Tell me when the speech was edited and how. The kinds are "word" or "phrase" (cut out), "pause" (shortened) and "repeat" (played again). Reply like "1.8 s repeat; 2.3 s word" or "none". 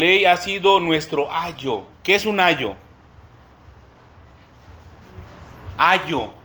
1.9 s pause